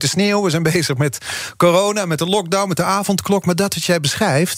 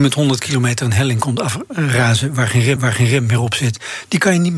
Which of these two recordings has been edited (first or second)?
second